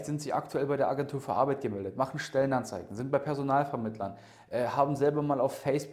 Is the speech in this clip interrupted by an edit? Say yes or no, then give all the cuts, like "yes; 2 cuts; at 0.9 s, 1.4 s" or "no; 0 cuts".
no; 0 cuts